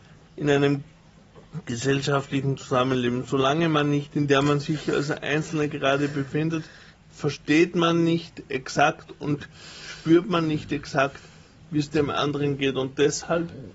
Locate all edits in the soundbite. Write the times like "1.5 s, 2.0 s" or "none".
4.3 s